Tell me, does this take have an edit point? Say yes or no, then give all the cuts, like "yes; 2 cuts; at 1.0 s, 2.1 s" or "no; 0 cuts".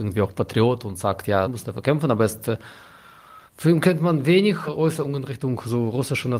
yes; 3 cuts; at 1.4 s, 3.5 s, 4.7 s